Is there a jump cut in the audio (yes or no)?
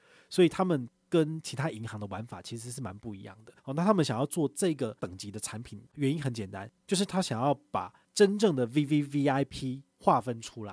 yes